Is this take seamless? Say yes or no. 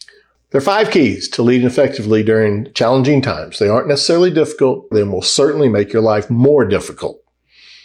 no